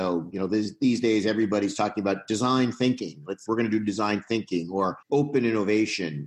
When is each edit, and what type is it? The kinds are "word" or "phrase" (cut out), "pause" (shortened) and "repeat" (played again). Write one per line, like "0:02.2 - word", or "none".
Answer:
0:03.5 - word
0:05.0 - pause